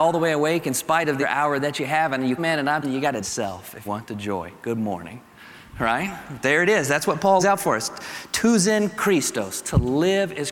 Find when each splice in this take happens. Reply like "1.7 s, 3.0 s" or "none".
1.2 s, 2.4 s, 2.8 s, 3.2 s, 3.9 s, 7.4 s